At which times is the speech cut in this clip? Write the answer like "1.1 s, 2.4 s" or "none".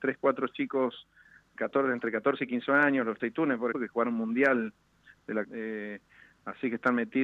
1.6 s, 3.2 s, 3.7 s, 5.4 s